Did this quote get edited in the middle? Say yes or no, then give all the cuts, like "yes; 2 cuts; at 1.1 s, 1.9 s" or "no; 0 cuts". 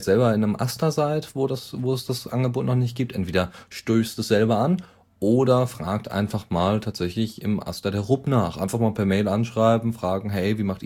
no; 0 cuts